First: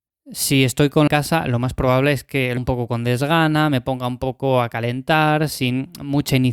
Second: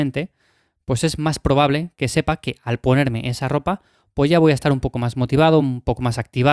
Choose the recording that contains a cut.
first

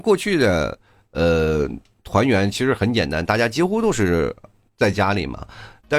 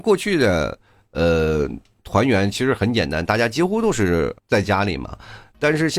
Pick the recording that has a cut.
second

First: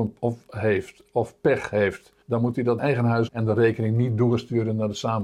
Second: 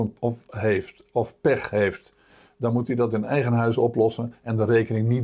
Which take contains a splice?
first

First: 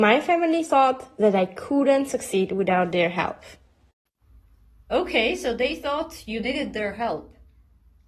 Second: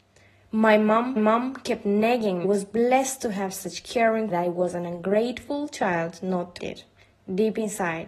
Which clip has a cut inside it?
second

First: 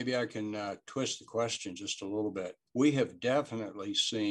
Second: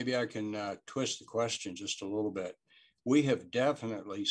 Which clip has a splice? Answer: first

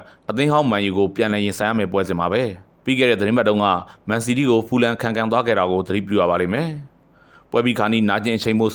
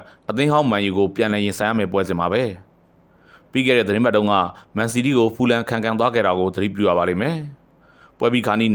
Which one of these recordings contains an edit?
first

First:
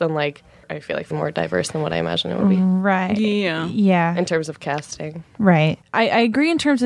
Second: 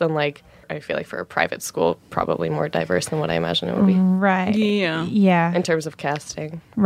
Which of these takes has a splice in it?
first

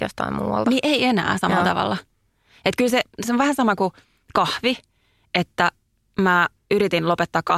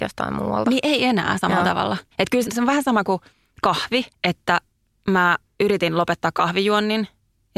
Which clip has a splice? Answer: second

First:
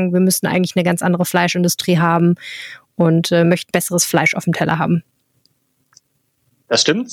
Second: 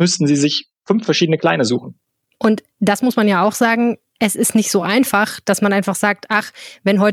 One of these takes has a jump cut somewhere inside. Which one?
first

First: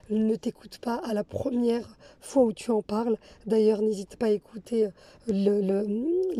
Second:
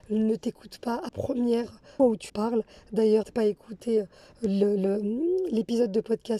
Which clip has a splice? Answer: second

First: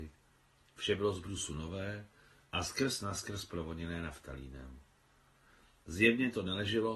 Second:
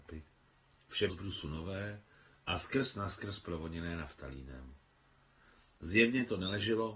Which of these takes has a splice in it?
second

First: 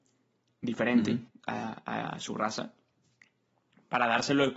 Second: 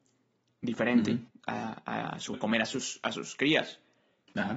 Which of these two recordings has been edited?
second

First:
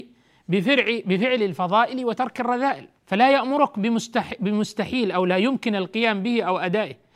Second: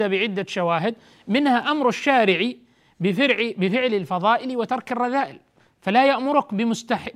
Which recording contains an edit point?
first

